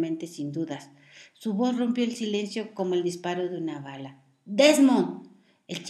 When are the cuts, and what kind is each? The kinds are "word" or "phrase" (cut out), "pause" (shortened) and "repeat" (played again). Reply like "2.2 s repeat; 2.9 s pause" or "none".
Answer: none

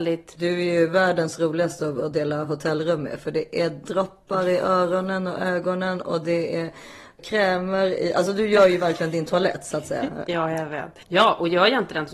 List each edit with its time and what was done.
11.0 s pause

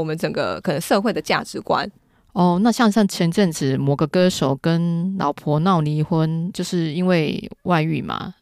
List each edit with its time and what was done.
none

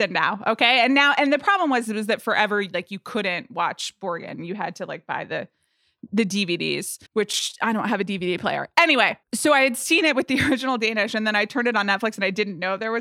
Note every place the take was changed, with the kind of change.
7.1 s pause; 9.2 s pause

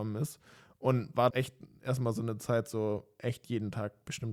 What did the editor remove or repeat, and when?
1.3 s phrase

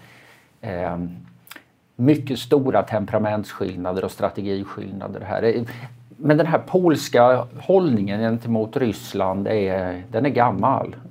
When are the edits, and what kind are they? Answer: none

